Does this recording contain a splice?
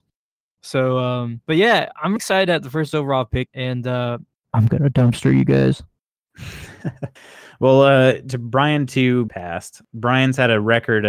yes; 5 cuts; at 2.2 s, 3.5 s, 4.3 s, 7.2 s, 9.3 s

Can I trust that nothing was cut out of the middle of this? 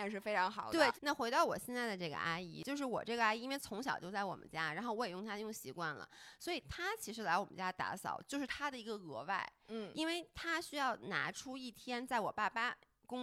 yes; 0 cuts

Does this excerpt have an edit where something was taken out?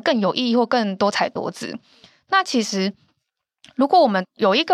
no; 0 cuts

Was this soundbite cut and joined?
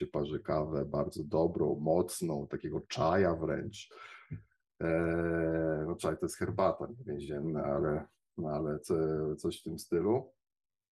no; 0 cuts

